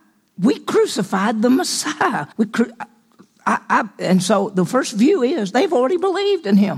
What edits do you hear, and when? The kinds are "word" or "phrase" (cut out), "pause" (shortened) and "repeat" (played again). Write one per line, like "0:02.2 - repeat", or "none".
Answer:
0:02.3 - pause